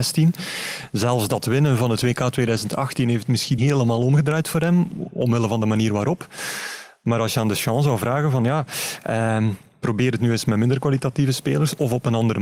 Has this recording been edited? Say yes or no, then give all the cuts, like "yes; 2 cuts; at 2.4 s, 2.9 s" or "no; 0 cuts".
yes; 1 cut; at 3.6 s